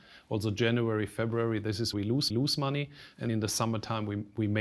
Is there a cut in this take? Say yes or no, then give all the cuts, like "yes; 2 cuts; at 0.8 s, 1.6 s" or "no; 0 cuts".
yes; 3 cuts; at 1.9 s, 2.3 s, 3.3 s